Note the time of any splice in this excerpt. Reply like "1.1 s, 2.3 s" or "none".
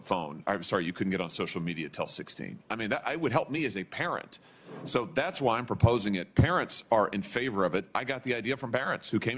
none